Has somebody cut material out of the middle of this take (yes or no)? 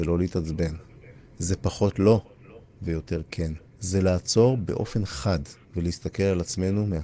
yes